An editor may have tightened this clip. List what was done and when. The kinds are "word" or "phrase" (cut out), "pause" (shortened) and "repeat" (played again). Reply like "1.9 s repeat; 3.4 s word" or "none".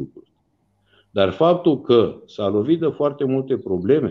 none